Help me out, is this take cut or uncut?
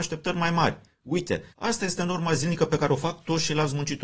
cut